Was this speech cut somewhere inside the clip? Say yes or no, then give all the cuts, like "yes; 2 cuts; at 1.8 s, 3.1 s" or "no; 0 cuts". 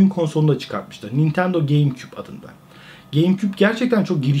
no; 0 cuts